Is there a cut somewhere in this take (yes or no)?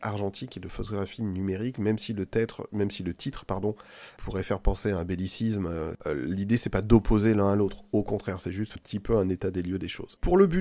yes